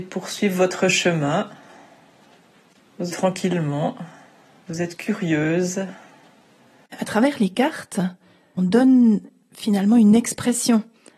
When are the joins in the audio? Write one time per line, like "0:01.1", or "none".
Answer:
0:03.1
0:08.6